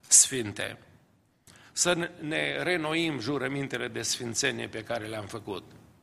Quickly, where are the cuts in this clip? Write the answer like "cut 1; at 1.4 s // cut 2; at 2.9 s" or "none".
none

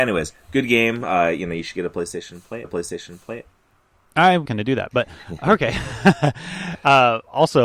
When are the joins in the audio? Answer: cut 1; at 2.6 s // cut 2; at 4.5 s

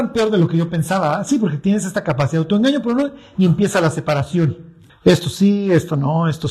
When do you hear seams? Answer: cut 1; at 4.9 s

